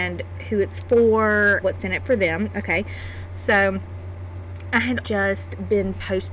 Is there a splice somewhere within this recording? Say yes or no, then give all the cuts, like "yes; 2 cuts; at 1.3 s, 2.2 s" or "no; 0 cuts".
yes; 2 cuts; at 1.6 s, 5.0 s